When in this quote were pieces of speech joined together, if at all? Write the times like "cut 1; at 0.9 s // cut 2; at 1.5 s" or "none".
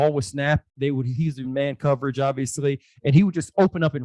none